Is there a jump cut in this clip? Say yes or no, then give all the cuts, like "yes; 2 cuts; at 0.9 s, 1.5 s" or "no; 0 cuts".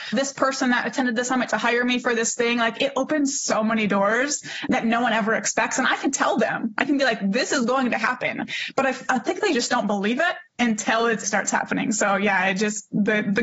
yes; 1 cut; at 11.2 s